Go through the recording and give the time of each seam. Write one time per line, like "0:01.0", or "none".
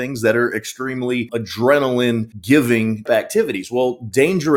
0:03.1